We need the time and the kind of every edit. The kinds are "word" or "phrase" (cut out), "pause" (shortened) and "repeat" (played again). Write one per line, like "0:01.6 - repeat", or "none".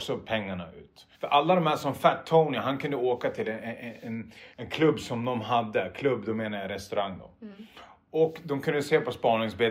0:01.1 - pause
0:04.5 - pause